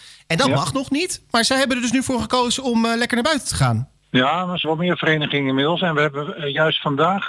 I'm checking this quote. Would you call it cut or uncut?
cut